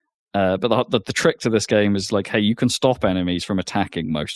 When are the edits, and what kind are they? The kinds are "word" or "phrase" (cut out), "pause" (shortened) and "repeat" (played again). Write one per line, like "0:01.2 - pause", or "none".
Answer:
none

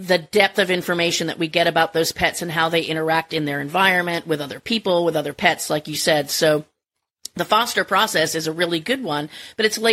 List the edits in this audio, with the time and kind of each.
none

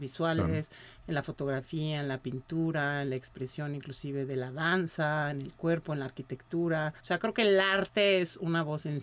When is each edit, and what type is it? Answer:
0:07.0 - pause

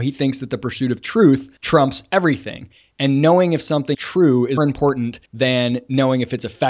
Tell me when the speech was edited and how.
0:01.6 - pause
0:03.9 - word
0:04.6 - word
0:05.3 - pause

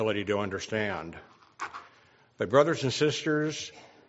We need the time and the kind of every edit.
none

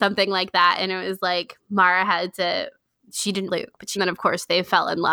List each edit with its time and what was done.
0:03.0 - word
0:03.5 - phrase
0:04.0 - phrase

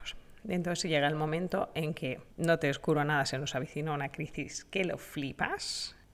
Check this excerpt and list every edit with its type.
none

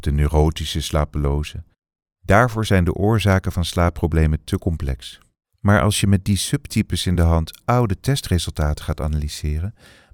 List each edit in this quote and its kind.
none

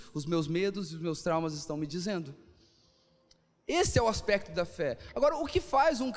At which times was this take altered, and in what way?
none

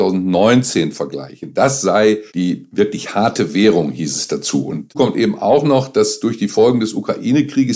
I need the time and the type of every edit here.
0:02.3 - pause
0:04.9 - word

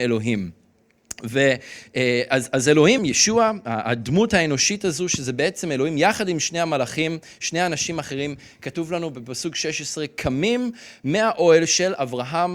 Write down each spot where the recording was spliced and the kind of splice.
0:03.0 - word

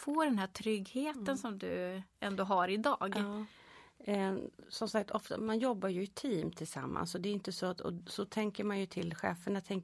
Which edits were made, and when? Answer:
0:02.1 - pause

